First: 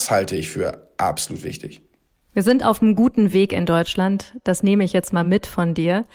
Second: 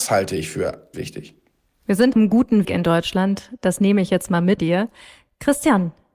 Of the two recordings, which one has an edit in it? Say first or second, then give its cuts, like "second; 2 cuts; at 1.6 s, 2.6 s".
second; 4 cuts; at 0.9 s, 2.1 s, 2.6 s, 4.6 s